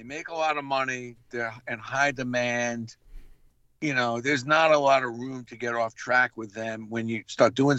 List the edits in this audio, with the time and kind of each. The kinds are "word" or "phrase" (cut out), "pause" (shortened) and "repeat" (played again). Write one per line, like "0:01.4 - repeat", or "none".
none